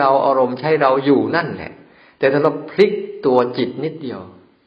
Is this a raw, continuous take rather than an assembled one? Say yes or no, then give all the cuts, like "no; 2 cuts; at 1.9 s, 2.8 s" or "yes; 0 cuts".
yes; 0 cuts